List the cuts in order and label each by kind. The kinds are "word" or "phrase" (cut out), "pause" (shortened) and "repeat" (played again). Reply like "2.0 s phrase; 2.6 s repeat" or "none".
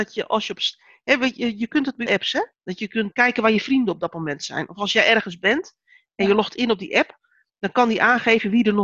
2.1 s phrase; 2.5 s pause; 3.1 s word